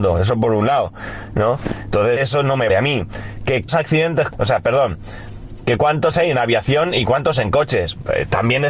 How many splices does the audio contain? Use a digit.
5